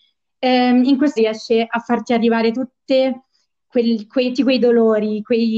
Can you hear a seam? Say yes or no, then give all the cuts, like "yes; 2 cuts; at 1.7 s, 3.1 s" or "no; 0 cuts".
yes; 2 cuts; at 1.2 s, 4.3 s